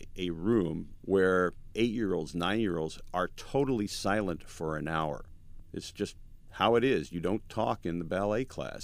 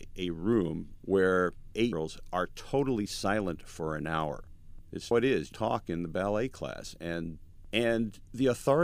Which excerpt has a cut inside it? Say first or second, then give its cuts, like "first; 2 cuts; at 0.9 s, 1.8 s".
second; 3 cuts; at 1.9 s, 5.1 s, 5.5 s